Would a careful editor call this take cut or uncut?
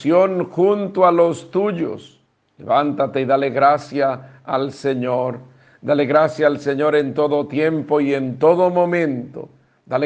uncut